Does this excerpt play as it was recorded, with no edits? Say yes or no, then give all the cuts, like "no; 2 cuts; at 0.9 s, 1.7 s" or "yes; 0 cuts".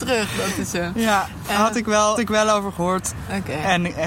no; 1 cut; at 2.1 s